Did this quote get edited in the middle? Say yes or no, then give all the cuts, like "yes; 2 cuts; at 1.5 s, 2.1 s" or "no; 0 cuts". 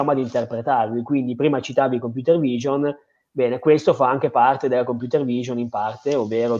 no; 0 cuts